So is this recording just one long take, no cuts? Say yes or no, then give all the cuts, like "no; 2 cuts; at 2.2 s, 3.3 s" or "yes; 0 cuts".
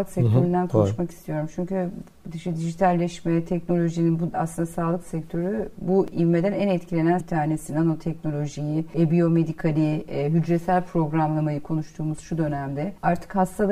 no; 2 cuts; at 4.3 s, 7.2 s